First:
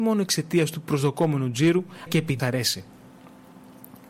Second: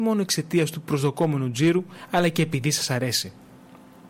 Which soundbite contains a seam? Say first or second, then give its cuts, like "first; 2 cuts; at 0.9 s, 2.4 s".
first; 2 cuts; at 2.1 s, 2.4 s